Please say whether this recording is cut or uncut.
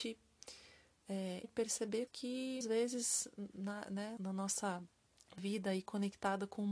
cut